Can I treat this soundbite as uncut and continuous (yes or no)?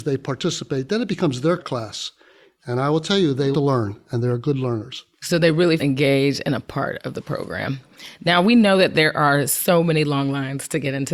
no